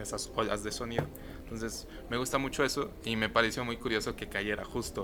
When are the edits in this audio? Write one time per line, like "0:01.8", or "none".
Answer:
none

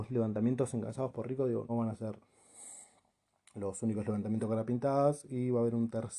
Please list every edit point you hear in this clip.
0:01.7

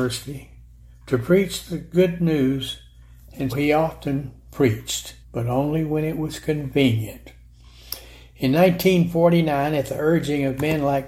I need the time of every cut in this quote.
0:03.5
0:05.2

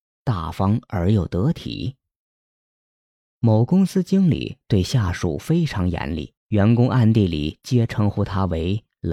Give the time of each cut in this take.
0:06.4

